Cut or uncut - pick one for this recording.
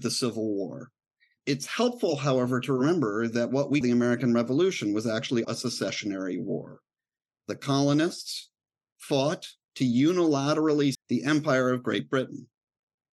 cut